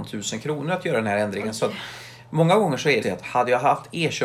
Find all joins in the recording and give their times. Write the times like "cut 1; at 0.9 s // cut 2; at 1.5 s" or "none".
cut 1; at 3.0 s